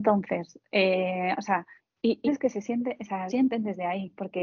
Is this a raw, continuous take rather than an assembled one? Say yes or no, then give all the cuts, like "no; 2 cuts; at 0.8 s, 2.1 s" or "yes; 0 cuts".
no; 3 cuts; at 1.8 s, 2.3 s, 3.3 s